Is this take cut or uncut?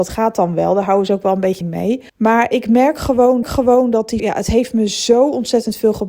cut